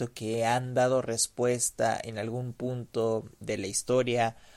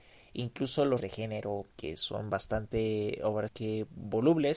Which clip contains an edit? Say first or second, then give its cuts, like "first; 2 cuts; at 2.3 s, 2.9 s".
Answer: second; 3 cuts; at 1.0 s, 1.7 s, 3.5 s